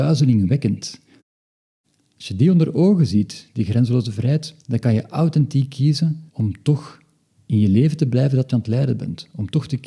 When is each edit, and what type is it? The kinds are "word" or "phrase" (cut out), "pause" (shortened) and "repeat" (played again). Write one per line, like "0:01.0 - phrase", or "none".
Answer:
0:04.6 - pause
0:06.3 - pause